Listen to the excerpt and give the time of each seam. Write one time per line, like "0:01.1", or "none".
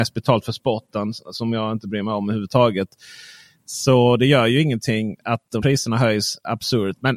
0:05.6